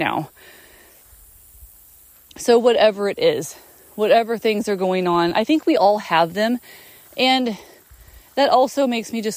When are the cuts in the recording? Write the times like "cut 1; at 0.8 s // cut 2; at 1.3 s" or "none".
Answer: none